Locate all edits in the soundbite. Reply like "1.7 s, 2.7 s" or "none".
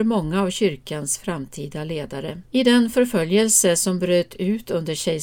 2.5 s